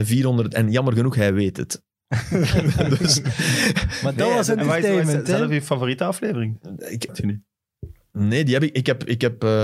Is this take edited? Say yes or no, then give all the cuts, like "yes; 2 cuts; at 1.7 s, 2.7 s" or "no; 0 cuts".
yes; 1 cut; at 7.1 s